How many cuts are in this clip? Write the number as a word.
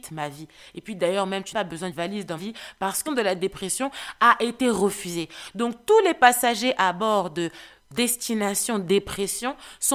five